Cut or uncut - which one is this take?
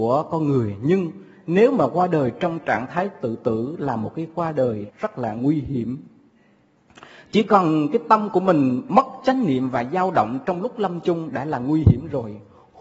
uncut